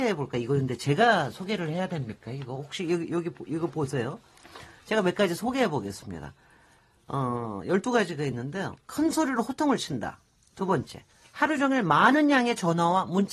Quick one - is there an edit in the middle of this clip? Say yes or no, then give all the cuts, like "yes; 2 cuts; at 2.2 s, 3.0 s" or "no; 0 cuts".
no; 0 cuts